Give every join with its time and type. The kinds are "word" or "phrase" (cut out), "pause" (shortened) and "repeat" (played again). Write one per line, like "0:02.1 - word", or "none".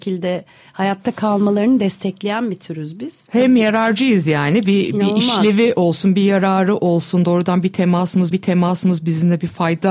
0:08.3 - repeat